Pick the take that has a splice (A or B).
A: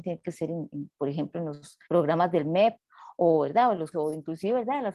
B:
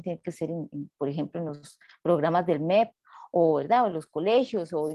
A